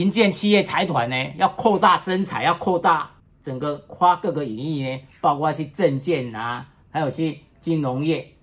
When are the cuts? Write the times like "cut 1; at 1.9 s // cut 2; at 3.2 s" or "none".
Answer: cut 1; at 3.2 s